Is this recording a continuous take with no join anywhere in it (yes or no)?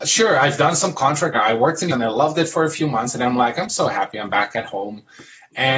no